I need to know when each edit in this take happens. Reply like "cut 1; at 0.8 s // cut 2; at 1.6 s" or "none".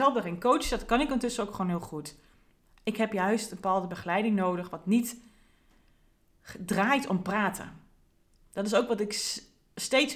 none